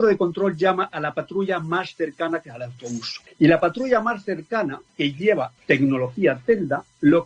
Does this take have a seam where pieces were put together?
yes; 3 cuts; at 3.3 s, 4.9 s, 5.6 s

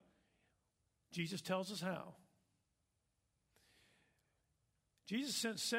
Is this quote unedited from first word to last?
yes; 0 cuts

